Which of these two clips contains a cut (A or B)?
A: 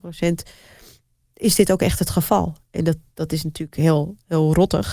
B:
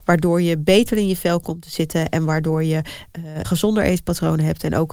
B